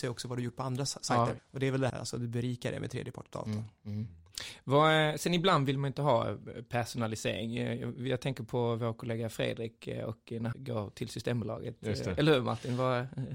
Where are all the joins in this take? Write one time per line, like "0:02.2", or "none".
0:01.4
0:01.9
0:10.5